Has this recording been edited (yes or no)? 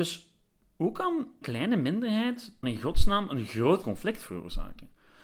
yes